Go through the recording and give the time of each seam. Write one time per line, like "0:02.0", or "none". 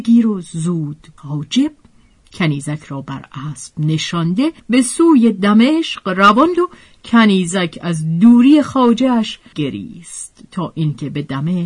0:01.2
0:04.6
0:06.6
0:09.5

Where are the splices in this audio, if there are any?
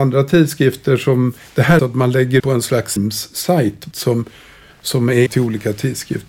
0:01.8
0:02.4
0:03.0
0:03.9
0:05.3

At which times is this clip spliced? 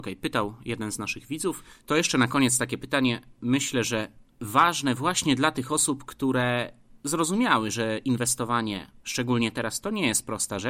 none

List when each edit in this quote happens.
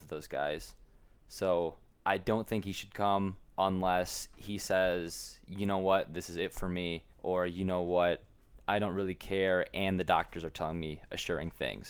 0:03.5
0:07.1

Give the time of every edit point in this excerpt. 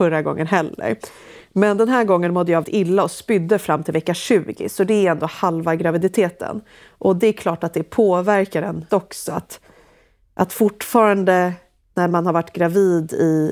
0:02.6
0:08.9

